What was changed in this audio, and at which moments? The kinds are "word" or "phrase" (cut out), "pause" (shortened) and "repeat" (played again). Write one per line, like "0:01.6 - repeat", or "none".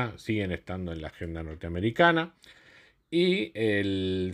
none